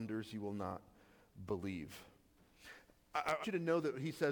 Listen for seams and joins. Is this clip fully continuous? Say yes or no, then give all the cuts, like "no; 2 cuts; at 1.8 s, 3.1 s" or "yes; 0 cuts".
no; 1 cut; at 3.4 s